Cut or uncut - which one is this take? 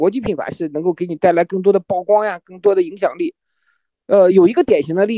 uncut